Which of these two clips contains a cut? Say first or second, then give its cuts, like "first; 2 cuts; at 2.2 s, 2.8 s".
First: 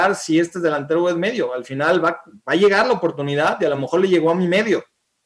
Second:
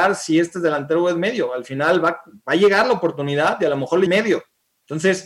second; 1 cut; at 4.1 s